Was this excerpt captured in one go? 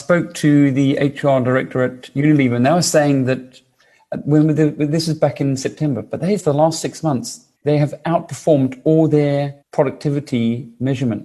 no; 3 cuts; at 6.4 s, 7.6 s, 9.6 s

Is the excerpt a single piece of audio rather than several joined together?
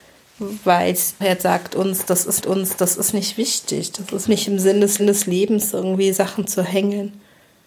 no; 5 cuts; at 1.2 s, 2.4 s, 4.3 s, 5.0 s, 6.1 s

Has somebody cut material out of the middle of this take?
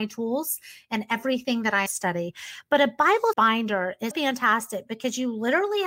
yes; 3 cuts; at 1.9 s, 3.3 s, 4.1 s

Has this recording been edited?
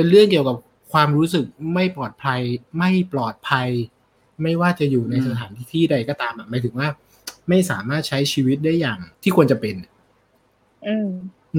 yes; 2 cuts; at 2.7 s, 9.1 s

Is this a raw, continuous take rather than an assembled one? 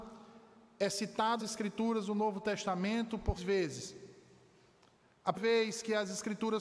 no; 3 cuts; at 1.4 s, 3.4 s, 5.3 s

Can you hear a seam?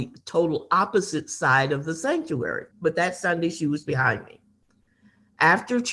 yes; 2 cuts; at 2.7 s, 3.8 s

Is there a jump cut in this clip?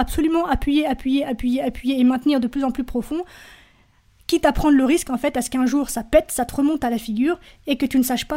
no; 0 cuts

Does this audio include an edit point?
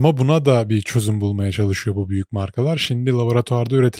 no; 0 cuts

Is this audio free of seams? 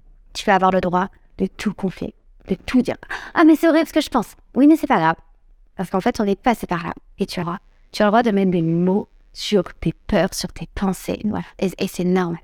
no; 2 cuts; at 6.4 s, 7.4 s

